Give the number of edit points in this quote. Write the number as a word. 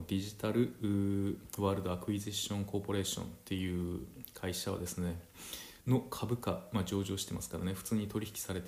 one